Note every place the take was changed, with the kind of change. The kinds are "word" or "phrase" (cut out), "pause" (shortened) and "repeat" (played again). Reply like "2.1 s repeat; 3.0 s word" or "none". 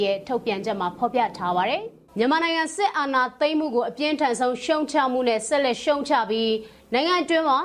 2.1 s pause

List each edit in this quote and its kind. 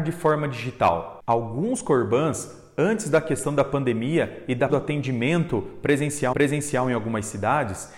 4.7 s word; 6.3 s repeat

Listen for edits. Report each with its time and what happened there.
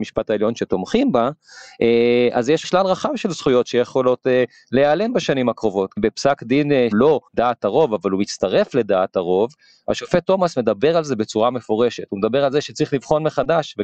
2.6 s word; 6.9 s word; 7.3 s pause

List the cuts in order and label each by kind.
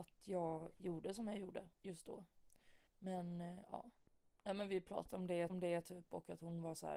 1.7 s pause; 2.9 s pause; 5.5 s repeat

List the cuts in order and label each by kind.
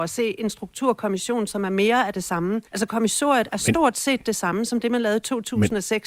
2.7 s pause

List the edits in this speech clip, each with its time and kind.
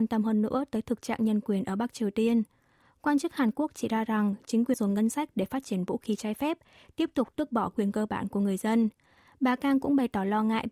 4.7 s phrase

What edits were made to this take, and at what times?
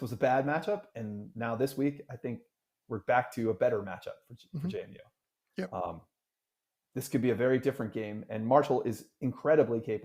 none

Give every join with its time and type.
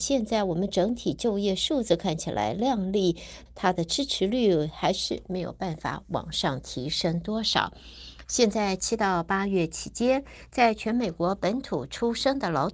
3.5 s phrase

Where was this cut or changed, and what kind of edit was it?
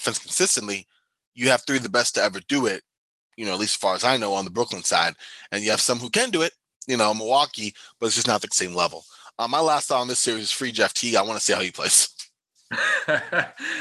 8.5 s word

